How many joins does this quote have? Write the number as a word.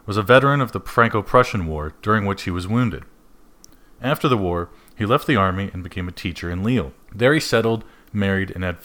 one